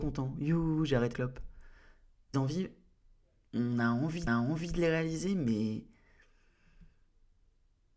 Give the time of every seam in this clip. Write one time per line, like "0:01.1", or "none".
0:01.1
0:02.3
0:04.3